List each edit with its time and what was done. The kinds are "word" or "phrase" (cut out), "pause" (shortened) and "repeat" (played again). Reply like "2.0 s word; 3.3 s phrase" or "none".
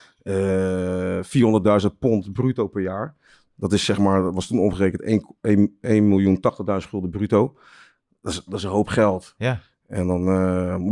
none